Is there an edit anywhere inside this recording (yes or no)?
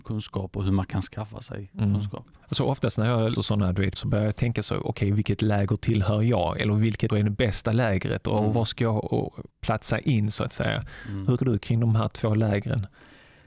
yes